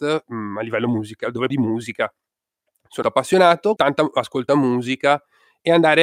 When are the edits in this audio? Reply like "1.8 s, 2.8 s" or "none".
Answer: 1.5 s, 3.0 s, 3.8 s, 4.5 s